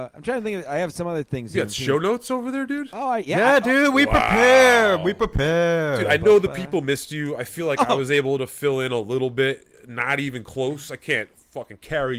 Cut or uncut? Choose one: uncut